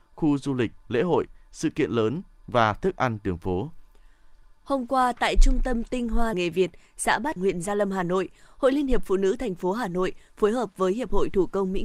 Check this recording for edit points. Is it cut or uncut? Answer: cut